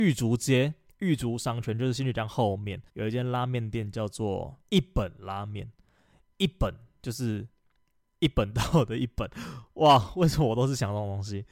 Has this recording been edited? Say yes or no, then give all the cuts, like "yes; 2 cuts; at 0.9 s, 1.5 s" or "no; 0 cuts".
yes; 1 cut; at 2.9 s